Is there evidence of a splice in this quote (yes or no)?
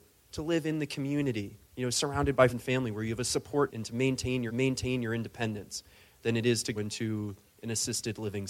yes